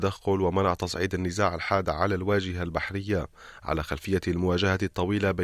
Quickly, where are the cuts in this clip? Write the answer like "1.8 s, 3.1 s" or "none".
none